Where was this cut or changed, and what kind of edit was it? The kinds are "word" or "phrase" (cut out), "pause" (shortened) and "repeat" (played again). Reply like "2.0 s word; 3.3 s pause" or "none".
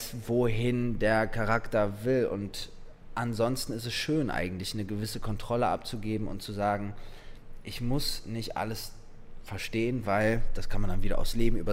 none